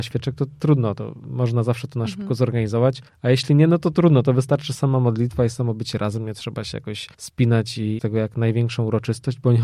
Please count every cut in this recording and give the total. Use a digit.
4